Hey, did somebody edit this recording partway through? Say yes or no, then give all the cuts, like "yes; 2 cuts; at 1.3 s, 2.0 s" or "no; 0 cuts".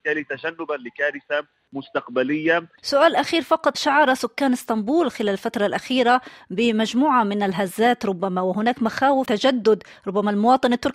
yes; 2 cuts; at 3.7 s, 9.3 s